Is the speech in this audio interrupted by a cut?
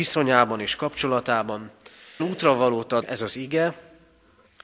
yes; 2 cuts; at 2.2 s, 3.0 s

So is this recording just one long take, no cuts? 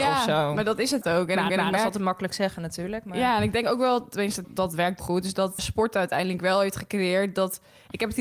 no; 5 cuts; at 1.0 s, 1.5 s, 4.4 s, 5.0 s, 5.6 s

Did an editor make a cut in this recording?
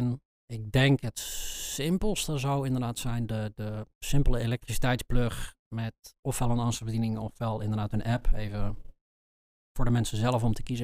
no; 0 cuts

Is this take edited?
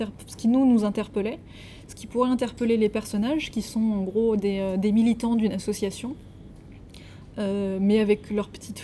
no; 0 cuts

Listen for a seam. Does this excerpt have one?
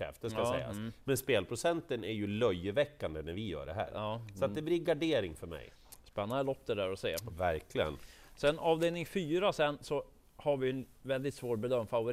no; 0 cuts

